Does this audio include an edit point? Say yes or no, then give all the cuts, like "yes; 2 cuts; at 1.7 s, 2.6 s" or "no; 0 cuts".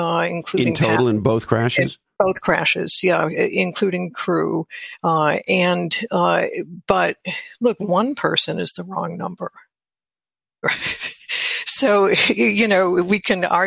no; 0 cuts